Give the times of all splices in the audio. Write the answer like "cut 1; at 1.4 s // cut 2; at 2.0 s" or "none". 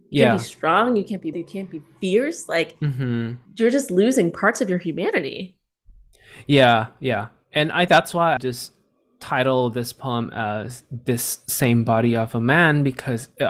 cut 1; at 1.3 s // cut 2; at 3.5 s // cut 3; at 7.9 s // cut 4; at 8.4 s